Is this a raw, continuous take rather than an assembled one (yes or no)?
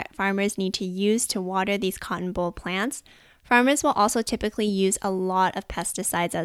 yes